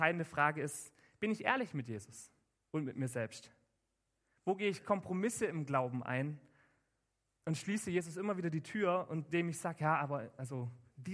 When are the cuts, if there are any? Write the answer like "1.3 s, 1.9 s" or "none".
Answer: none